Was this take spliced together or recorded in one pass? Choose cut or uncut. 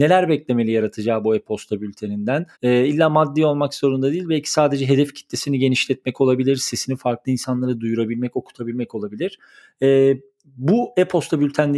cut